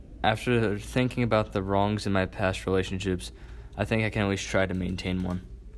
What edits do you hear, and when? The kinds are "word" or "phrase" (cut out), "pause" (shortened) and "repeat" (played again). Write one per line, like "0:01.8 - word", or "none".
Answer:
none